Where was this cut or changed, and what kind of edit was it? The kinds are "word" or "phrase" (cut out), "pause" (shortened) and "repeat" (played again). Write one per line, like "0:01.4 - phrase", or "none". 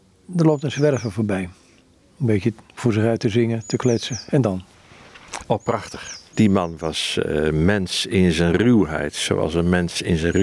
none